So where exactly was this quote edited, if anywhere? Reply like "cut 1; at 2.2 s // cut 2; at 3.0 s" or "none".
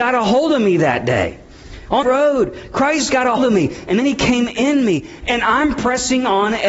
cut 1; at 2.0 s // cut 2; at 3.4 s